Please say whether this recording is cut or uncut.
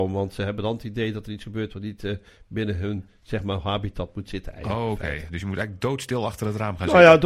uncut